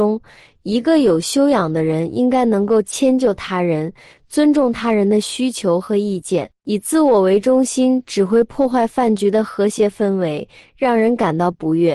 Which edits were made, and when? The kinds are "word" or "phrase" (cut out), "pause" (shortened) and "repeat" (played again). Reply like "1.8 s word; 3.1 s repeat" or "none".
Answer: none